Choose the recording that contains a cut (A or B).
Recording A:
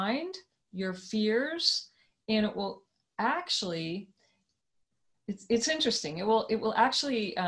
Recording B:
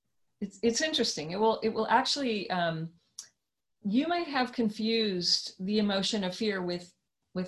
B